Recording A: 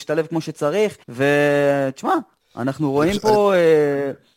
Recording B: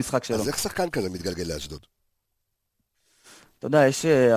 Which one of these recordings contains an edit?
A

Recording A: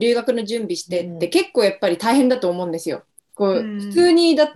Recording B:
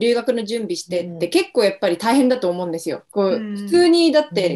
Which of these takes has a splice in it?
B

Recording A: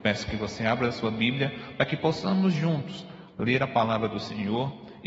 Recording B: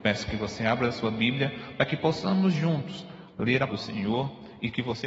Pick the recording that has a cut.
B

